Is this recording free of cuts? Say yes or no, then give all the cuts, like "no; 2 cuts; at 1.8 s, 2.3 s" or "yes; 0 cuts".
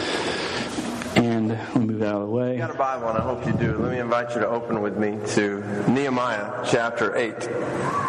yes; 0 cuts